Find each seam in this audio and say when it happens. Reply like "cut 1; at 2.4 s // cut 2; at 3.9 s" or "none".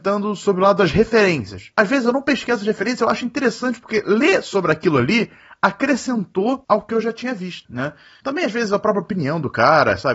none